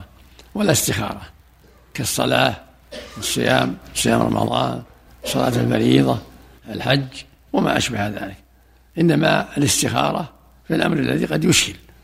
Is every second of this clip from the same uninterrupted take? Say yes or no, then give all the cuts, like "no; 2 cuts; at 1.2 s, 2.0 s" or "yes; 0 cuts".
yes; 0 cuts